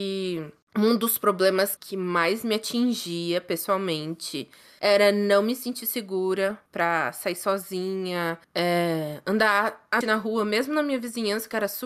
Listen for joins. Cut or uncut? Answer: cut